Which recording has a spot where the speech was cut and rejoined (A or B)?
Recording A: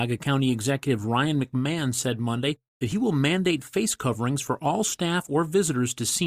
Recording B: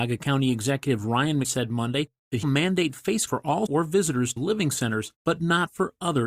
B